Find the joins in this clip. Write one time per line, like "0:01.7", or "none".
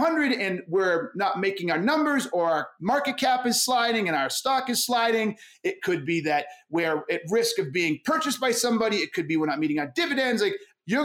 none